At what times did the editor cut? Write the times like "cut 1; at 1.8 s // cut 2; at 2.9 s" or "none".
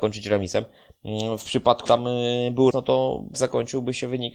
cut 1; at 1.9 s // cut 2; at 2.7 s // cut 3; at 3.3 s